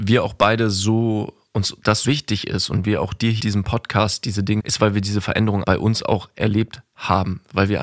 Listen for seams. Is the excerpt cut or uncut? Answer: cut